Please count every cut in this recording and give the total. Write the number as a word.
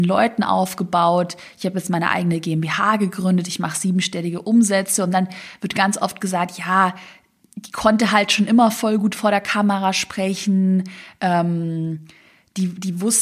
zero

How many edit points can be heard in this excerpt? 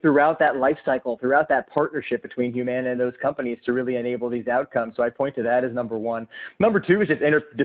zero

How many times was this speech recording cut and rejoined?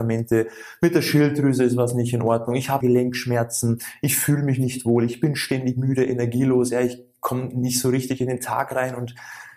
one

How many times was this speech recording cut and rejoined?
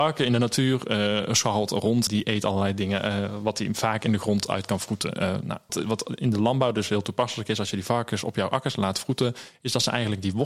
two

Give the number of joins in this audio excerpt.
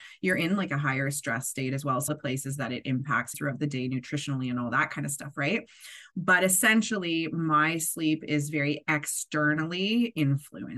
two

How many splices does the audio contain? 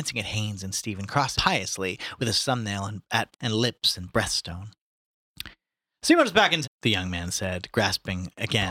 three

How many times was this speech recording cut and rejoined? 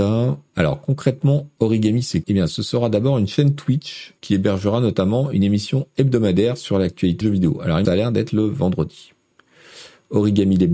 four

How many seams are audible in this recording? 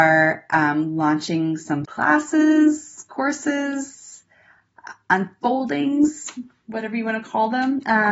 one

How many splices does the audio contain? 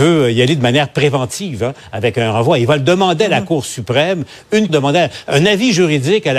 one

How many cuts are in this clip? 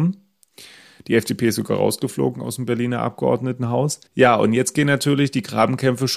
one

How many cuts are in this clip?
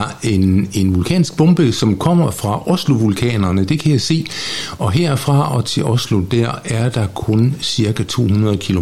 zero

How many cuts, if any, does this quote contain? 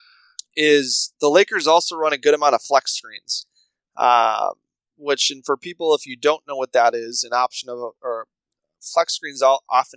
zero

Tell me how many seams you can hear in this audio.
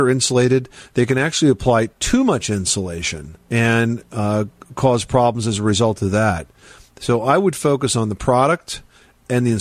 one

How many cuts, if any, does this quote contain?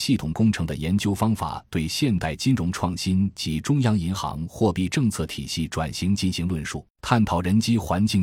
one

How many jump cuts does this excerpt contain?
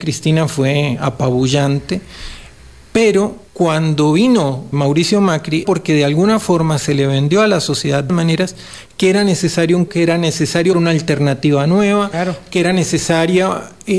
six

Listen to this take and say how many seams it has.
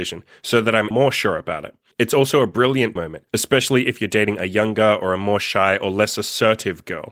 four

